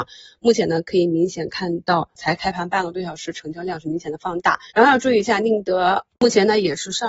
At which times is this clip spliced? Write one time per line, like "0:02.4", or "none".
0:02.2
0:04.7